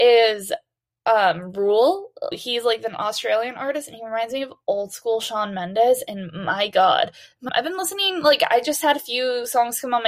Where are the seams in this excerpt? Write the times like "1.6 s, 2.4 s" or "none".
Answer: 2.3 s, 7.5 s

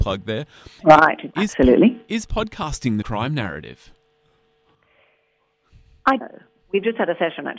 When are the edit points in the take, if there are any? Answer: 1.3 s, 3.0 s, 6.2 s

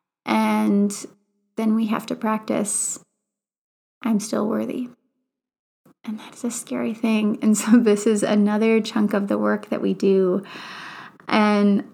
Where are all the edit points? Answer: none

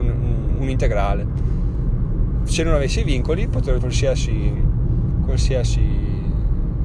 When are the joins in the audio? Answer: 3.8 s

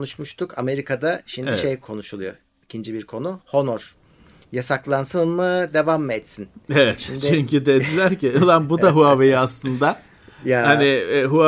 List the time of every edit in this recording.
none

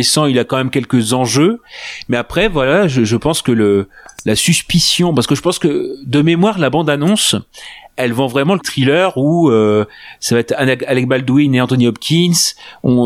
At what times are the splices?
8.6 s

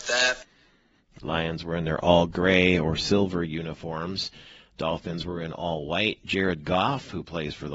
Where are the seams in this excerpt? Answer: none

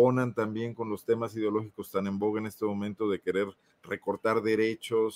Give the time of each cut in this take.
none

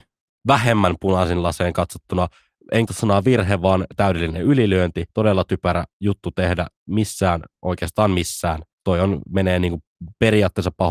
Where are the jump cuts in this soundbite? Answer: 2.9 s, 5.1 s, 5.9 s, 7.5 s, 8.7 s

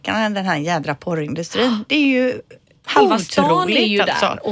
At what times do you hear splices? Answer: none

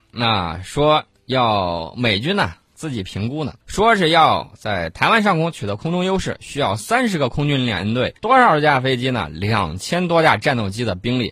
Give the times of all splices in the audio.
3.6 s, 8.2 s

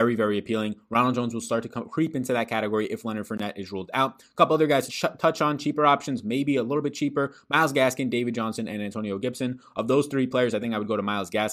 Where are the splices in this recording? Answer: 4.9 s

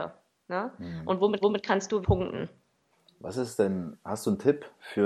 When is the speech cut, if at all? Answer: 1.4 s, 2.0 s, 2.9 s

